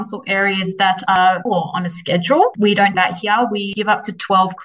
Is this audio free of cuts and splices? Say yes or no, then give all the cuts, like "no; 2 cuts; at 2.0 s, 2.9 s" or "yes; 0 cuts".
no; 2 cuts; at 1.5 s, 2.9 s